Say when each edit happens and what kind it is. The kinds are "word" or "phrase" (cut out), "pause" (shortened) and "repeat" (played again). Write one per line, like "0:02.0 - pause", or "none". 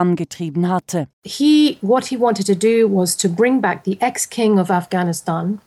0:01.1 - pause